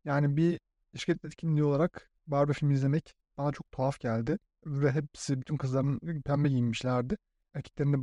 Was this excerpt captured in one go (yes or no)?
no